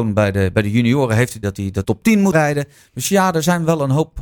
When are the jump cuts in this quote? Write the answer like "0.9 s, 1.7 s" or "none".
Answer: 1.4 s, 1.8 s, 2.3 s